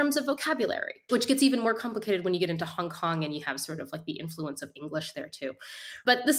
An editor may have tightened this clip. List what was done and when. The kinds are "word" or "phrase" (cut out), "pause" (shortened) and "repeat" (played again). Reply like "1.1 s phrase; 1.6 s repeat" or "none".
none